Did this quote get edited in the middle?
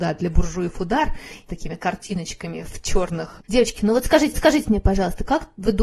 yes; 3 cuts; at 1.5 s, 3.4 s, 4.3 s

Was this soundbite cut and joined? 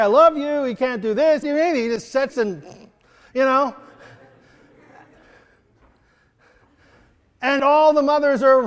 yes; 3 cuts; at 1.4 s, 2.3 s, 7.6 s

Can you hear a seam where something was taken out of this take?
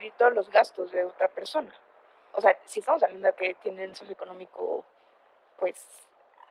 yes; 2 cuts; at 3.3 s, 3.9 s

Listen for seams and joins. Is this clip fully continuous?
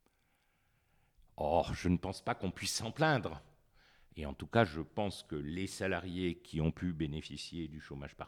yes; 0 cuts

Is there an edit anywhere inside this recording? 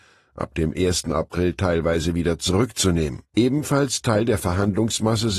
yes; 1 cut; at 3.3 s

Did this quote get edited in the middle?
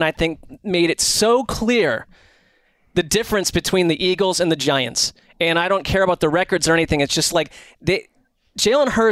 no; 0 cuts

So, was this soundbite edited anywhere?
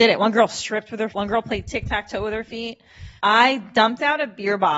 yes; 2 cuts; at 1.1 s, 3.2 s

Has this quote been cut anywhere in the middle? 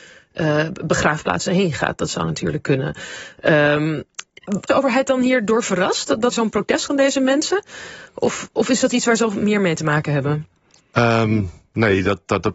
yes; 3 cuts; at 4.7 s, 6.3 s, 6.9 s

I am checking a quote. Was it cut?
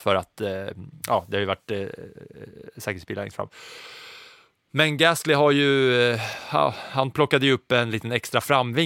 no; 0 cuts

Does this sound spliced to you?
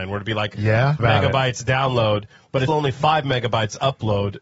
yes; 2 cuts; at 1.0 s, 2.7 s

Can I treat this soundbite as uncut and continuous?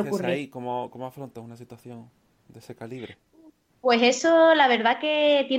yes; 0 cuts

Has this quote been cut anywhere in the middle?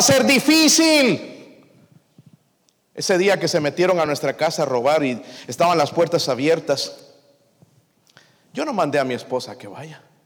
no; 0 cuts

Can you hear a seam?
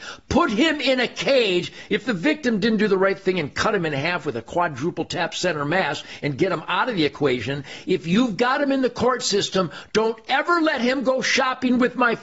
no; 0 cuts

